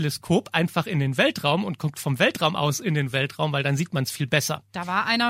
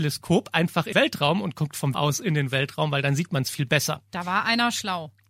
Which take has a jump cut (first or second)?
second